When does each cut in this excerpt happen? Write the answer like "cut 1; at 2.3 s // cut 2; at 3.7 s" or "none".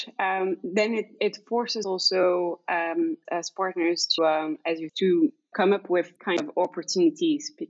cut 1; at 1.8 s // cut 2; at 3.3 s // cut 3; at 4.2 s // cut 4; at 4.9 s // cut 5; at 5.5 s // cut 6; at 6.2 s